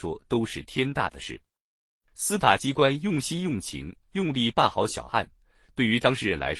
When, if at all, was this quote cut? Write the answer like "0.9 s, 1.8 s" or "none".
none